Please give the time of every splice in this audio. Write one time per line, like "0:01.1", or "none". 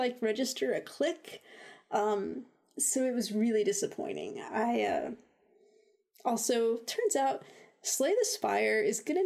none